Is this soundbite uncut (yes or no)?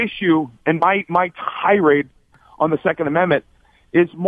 yes